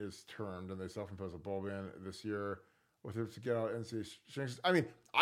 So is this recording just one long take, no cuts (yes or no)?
yes